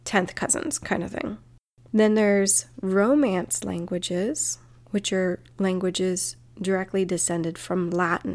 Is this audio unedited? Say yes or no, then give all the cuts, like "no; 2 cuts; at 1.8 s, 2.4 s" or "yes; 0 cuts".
yes; 0 cuts